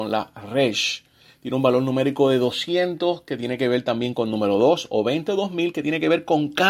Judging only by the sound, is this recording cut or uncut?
uncut